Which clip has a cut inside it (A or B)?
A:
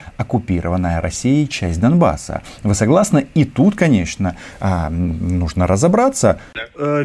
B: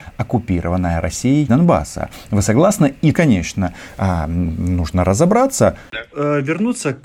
B